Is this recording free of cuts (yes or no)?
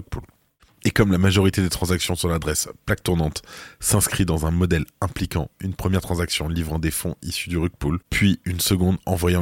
no